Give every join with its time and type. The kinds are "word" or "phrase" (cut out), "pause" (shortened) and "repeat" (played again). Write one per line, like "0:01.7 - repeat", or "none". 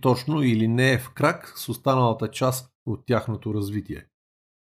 none